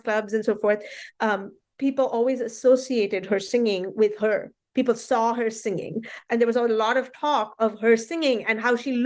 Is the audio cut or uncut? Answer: uncut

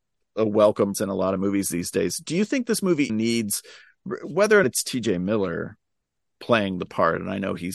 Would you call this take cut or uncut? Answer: cut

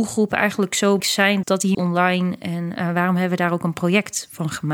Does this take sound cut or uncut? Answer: cut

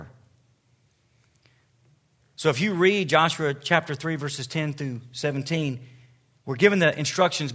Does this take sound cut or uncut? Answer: uncut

